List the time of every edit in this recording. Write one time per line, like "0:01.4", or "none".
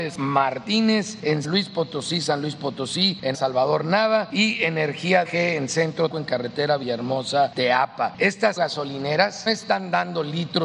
0:01.4
0:03.3
0:05.2
0:06.1
0:08.6
0:09.5